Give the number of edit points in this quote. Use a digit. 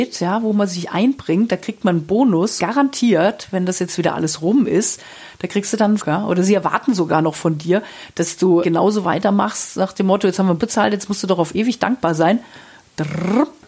4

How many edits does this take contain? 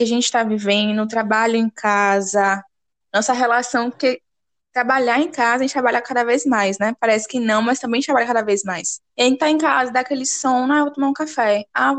1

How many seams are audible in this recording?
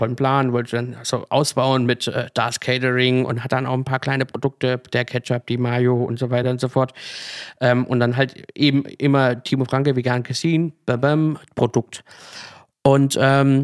0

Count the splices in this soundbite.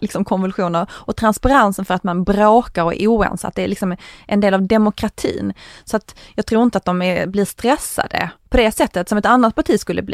0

